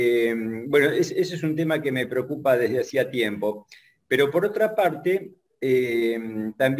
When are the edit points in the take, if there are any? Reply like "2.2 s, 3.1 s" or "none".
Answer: none

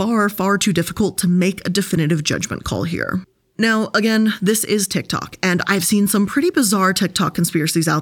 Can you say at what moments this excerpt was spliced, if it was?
none

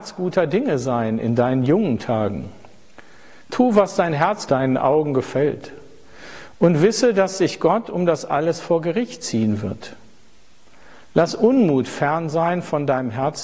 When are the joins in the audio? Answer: 4.5 s

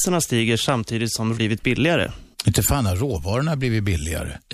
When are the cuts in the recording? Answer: 1.4 s, 2.3 s

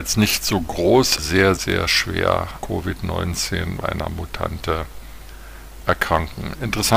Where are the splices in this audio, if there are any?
1.2 s, 1.6 s, 2.6 s, 3.8 s

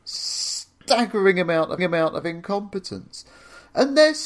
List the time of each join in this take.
1.8 s

